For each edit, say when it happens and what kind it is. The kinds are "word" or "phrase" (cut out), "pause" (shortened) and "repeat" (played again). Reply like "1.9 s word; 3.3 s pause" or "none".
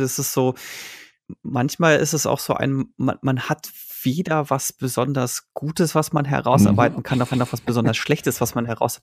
7.3 s repeat